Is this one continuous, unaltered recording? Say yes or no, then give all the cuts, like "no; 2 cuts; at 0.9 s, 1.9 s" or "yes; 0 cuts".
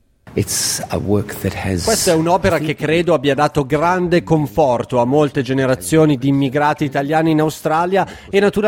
yes; 0 cuts